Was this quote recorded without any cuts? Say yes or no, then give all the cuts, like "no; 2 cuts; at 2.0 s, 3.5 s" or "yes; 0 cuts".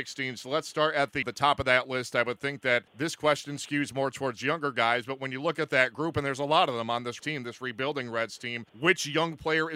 no; 4 cuts; at 1.2 s, 2.9 s, 7.2 s, 8.7 s